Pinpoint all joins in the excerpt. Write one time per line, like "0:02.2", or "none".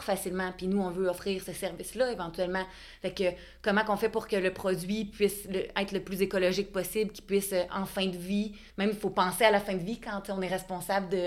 0:08.7